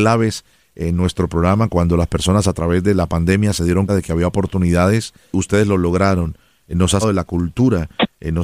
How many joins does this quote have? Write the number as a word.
three